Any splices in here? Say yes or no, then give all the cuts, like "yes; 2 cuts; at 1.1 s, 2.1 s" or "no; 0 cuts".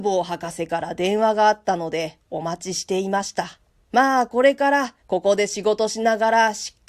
yes; 2 cuts; at 3.7 s, 5.0 s